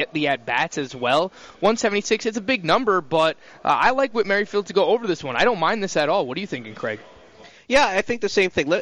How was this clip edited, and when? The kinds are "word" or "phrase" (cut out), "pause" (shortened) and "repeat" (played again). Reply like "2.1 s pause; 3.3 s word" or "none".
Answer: none